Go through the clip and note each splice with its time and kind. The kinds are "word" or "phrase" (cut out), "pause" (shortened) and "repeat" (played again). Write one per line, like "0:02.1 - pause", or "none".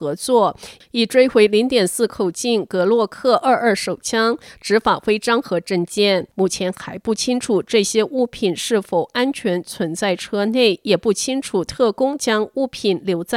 0:06.3 - pause